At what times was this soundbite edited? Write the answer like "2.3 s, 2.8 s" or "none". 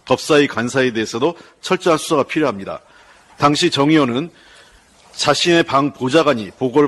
none